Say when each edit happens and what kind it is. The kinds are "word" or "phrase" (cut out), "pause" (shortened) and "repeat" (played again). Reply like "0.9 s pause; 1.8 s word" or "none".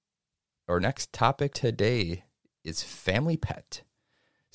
1.5 s word; 2.5 s pause